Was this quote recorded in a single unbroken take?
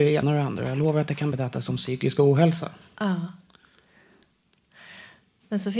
yes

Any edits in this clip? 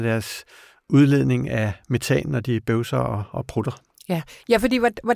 no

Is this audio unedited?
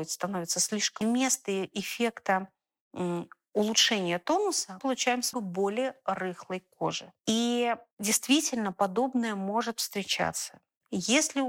no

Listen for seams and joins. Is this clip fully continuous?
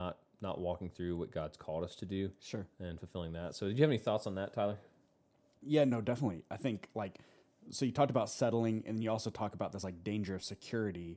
yes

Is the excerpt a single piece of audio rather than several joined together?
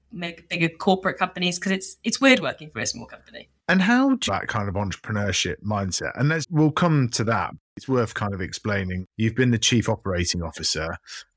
no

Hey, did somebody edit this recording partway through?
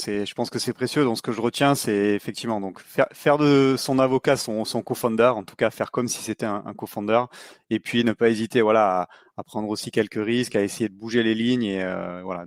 no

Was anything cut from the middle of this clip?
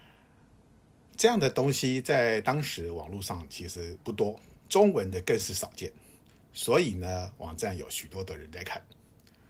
yes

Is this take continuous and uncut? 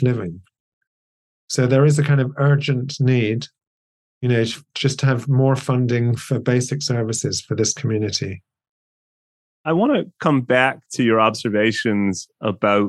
yes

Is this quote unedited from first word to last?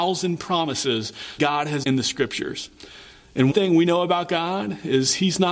no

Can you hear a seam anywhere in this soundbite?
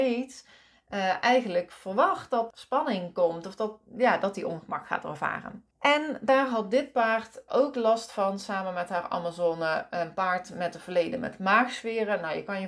yes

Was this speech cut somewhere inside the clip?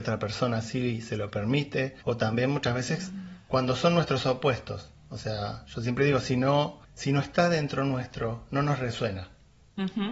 yes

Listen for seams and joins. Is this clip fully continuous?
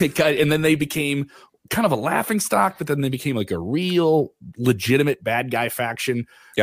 yes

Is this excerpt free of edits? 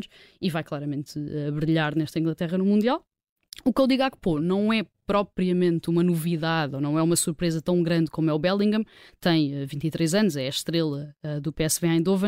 yes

